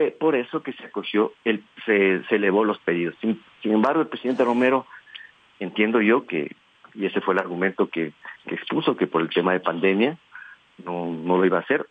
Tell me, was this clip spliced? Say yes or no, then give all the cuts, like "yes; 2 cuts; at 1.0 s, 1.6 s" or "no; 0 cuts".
no; 0 cuts